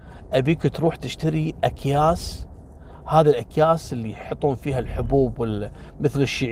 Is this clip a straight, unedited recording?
yes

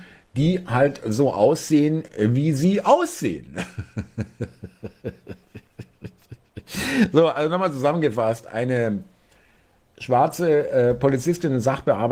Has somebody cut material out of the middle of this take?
no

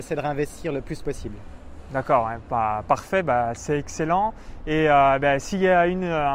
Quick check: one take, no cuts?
yes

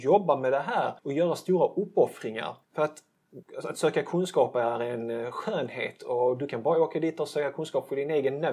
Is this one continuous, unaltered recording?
no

